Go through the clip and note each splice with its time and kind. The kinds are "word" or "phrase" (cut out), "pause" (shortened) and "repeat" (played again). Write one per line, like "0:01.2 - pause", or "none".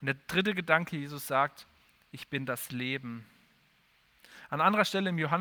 none

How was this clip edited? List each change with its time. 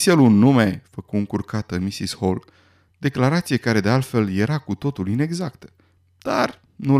none

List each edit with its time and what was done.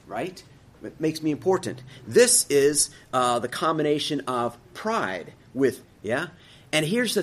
0:05.8 - word

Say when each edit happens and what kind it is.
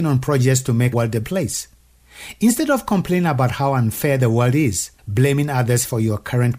0:00.9 - word
0:01.2 - word
0:05.0 - pause

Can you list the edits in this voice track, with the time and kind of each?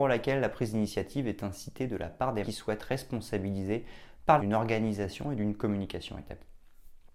0:02.4 - word
0:04.4 - word

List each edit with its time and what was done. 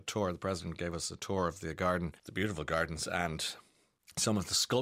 none

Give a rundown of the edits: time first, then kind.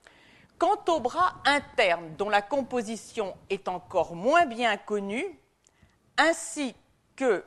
none

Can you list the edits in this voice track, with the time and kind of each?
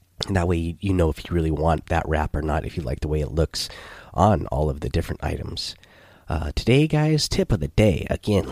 none

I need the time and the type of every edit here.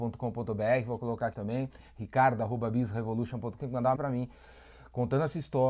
0:01.3 - word
0:03.6 - word
0:04.0 - word

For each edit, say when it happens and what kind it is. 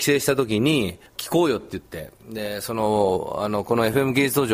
0:01.1 - pause

